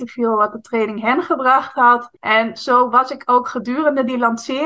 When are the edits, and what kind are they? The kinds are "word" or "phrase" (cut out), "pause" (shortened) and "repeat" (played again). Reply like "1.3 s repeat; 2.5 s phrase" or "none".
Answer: 2.2 s pause